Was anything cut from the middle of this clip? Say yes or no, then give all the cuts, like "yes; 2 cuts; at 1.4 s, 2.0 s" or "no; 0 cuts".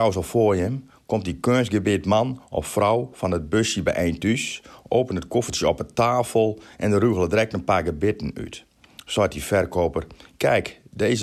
no; 0 cuts